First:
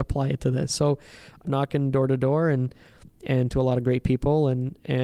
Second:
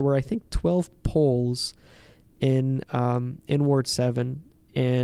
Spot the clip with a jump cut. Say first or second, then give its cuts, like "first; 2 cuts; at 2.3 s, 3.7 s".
first; 2 cuts; at 1.4 s, 3.5 s